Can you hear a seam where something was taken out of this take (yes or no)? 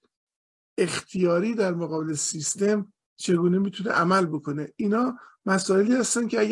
no